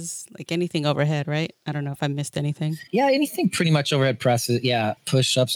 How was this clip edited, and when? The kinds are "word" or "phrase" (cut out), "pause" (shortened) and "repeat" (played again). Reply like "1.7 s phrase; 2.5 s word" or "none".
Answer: 2.9 s pause